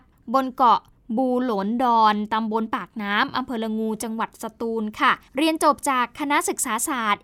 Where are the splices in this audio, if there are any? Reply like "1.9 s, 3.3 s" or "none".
5.3 s